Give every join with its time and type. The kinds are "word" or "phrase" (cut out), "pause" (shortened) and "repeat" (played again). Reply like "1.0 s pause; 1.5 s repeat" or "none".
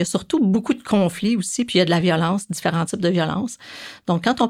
none